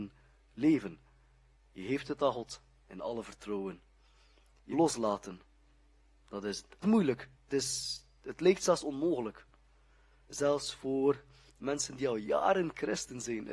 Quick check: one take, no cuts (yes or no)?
no